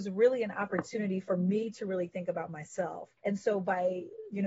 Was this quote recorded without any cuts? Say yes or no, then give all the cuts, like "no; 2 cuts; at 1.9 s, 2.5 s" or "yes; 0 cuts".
no; 1 cut; at 3.2 s